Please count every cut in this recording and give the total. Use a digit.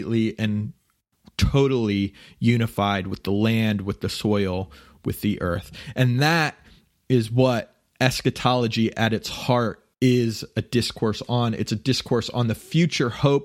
1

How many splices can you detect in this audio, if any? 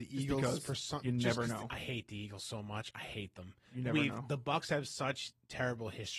0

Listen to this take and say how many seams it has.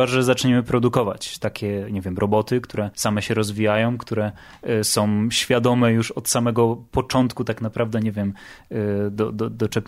1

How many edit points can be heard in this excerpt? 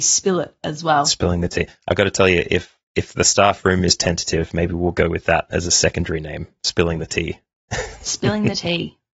0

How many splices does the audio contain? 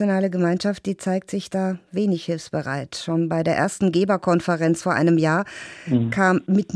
0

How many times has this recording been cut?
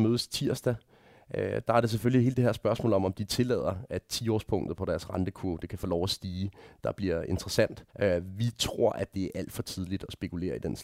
1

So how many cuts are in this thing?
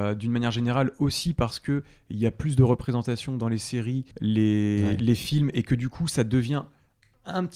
1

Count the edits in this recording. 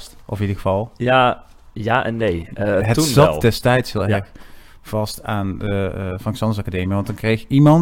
0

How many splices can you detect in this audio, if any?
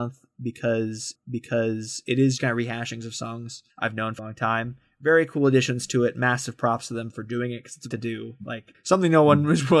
6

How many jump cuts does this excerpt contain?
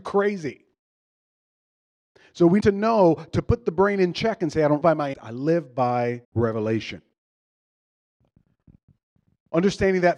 4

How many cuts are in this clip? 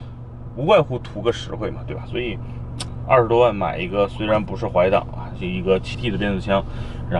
1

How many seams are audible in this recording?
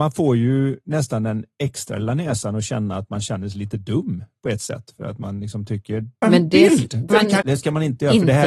3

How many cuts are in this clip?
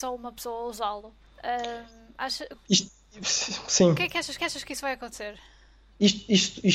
2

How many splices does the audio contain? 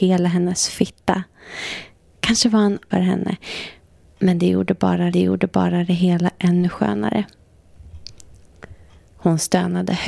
2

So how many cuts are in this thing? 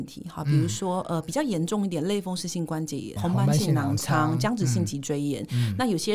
1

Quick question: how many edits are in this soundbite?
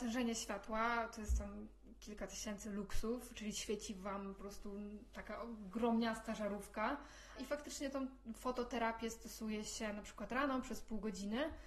0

